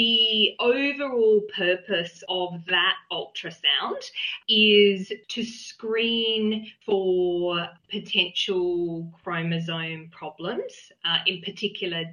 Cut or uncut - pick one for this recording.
uncut